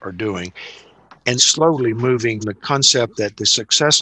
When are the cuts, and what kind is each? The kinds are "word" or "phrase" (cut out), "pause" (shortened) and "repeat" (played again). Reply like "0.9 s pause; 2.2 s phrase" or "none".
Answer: 1.4 s word; 2.4 s word